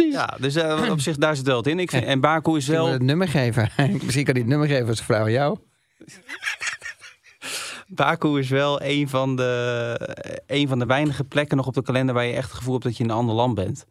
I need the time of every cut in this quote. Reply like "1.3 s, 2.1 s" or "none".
none